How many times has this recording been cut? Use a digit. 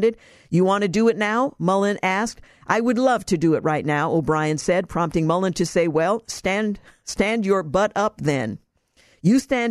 0